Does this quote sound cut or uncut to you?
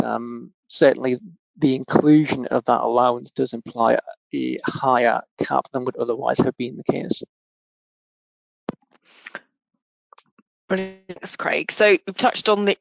uncut